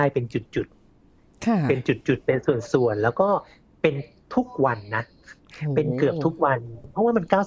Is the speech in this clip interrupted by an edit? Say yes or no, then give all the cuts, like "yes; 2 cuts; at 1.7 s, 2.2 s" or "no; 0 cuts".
no; 0 cuts